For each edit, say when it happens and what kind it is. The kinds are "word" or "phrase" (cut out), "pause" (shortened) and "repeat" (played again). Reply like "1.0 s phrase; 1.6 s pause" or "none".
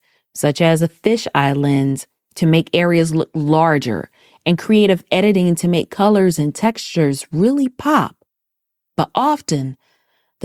none